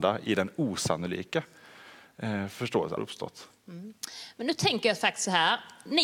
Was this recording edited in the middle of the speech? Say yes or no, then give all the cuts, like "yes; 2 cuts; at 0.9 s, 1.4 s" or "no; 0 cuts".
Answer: yes; 1 cut; at 3.0 s